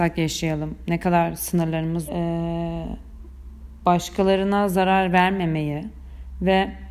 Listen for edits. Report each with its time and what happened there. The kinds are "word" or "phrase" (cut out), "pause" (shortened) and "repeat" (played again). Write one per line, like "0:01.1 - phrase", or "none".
0:02.1 - phrase